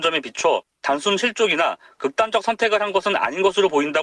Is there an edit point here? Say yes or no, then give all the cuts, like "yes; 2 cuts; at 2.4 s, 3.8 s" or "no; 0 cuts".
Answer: no; 0 cuts